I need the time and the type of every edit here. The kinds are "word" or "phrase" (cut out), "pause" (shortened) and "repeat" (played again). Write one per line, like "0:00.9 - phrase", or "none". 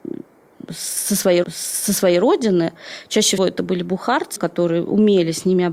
0:01.4 - repeat
0:03.4 - word
0:04.4 - word